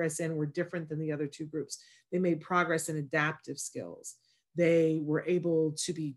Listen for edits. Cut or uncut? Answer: uncut